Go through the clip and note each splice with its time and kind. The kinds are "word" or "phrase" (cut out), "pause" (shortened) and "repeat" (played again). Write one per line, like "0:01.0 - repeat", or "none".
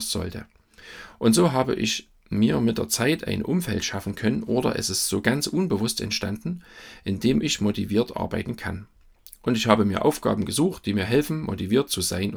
none